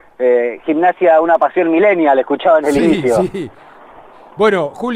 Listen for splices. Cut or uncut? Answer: uncut